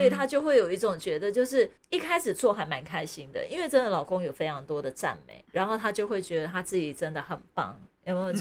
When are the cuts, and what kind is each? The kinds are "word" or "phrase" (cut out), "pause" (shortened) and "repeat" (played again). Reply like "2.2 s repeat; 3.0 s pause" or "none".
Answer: none